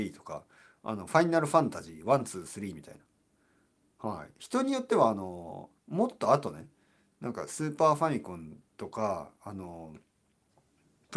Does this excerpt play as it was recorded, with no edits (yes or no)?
no